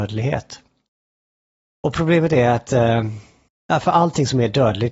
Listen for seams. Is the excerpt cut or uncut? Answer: uncut